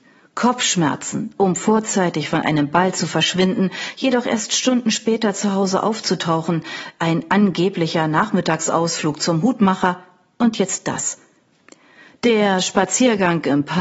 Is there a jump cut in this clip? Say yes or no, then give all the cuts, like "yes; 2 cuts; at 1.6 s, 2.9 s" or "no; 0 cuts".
no; 0 cuts